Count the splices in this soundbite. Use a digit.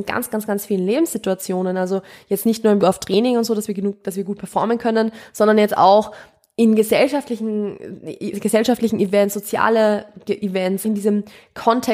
3